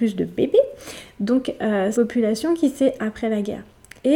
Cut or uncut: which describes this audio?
cut